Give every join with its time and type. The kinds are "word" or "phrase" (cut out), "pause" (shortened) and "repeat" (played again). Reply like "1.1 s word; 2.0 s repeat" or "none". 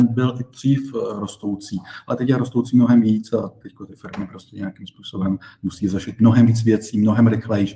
none